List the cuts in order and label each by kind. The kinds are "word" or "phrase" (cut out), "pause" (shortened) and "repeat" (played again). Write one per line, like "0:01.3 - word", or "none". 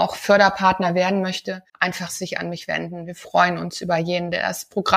0:01.7 - pause

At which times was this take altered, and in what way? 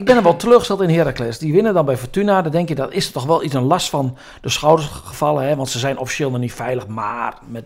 none

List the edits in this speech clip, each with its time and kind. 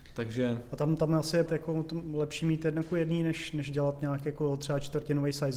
0:01.5 - word

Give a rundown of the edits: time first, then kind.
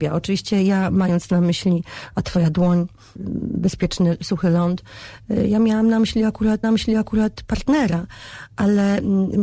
0:06.6 - repeat

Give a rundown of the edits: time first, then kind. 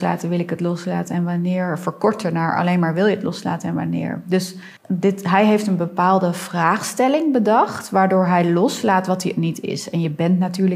0:04.8 - pause

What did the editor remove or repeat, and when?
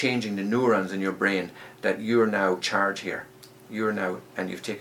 0:02.6 - word

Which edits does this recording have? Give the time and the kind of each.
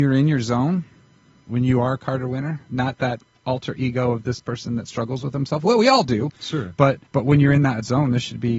0:07.1 - pause

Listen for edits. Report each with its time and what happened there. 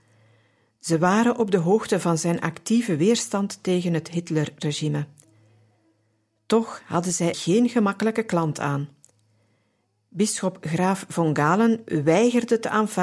0:07.3 - word

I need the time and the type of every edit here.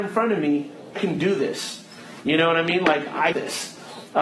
0:01.0 - word
0:03.3 - word

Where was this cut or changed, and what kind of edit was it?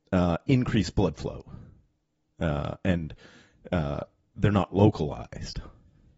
none

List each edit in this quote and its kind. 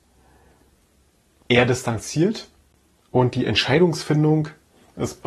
none

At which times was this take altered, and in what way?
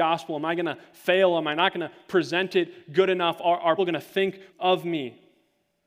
0:03.8 - word
0:04.5 - word

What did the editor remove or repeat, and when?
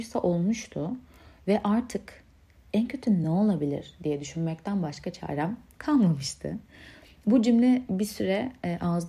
none

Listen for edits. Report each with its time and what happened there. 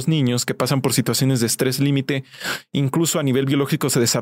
none

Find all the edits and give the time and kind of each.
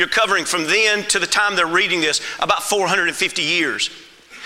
none

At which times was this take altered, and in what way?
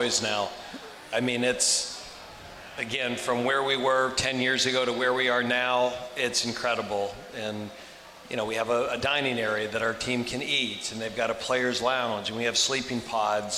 none

